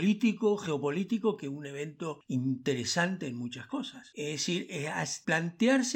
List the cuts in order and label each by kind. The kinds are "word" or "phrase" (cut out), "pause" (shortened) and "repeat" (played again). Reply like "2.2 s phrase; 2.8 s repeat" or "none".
none

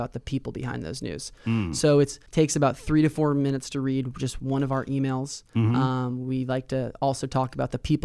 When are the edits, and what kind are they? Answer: 2.3 s pause

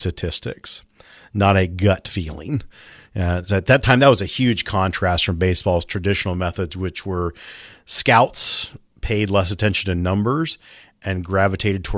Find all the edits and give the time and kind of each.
none

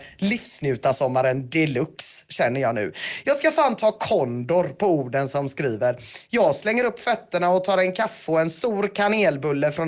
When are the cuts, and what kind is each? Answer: none

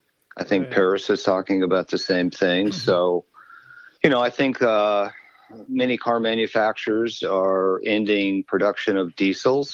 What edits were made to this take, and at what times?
3.9 s pause

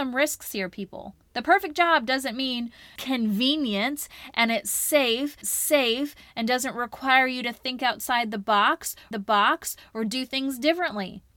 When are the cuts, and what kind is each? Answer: 3.0 s word; 5.4 s repeat; 9.1 s repeat

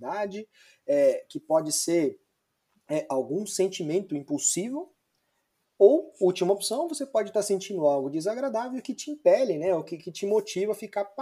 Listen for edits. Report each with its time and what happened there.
none

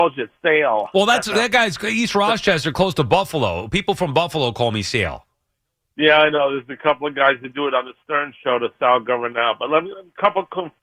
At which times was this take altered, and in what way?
none

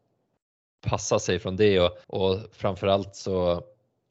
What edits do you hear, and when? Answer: 2.0 s pause

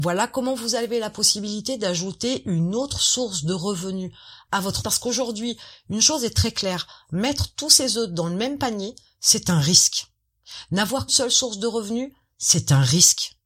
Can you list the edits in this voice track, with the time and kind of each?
4.8 s word; 11.1 s word

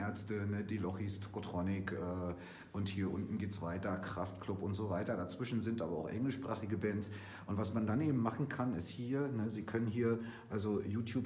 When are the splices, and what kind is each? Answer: none

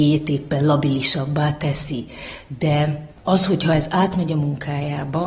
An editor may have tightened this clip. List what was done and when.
3.1 s pause

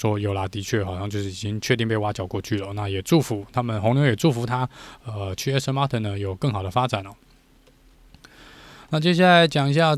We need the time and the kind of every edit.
none

